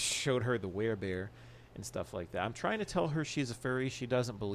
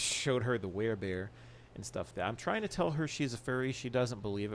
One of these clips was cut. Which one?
second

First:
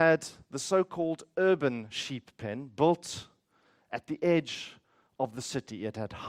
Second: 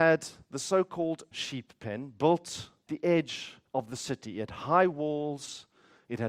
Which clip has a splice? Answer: second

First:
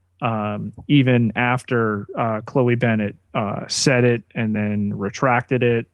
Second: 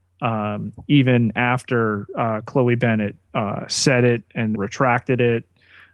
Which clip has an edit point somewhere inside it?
second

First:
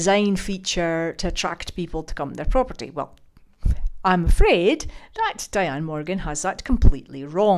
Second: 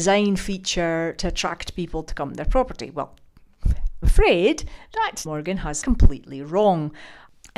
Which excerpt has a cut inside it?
second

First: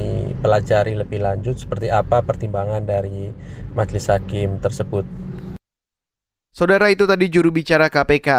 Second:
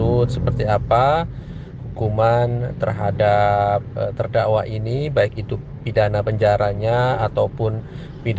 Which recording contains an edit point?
second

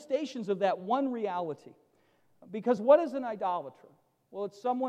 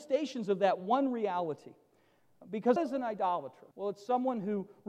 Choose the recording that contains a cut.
second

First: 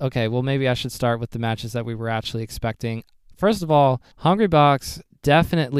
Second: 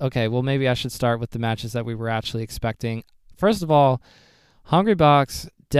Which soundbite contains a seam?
first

